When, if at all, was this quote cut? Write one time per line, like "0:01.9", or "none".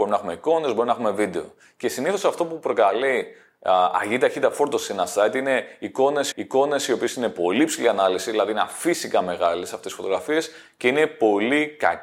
0:06.3